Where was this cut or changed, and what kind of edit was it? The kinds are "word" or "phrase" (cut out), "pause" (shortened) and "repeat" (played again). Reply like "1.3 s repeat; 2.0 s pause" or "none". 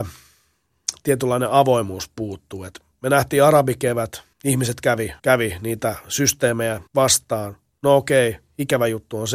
4.3 s pause; 5.2 s pause; 6.9 s pause